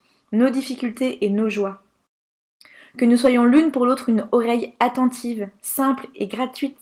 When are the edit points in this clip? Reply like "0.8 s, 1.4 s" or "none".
2.4 s